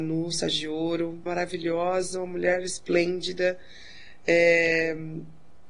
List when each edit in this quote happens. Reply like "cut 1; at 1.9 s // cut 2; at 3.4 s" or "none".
cut 1; at 1.3 s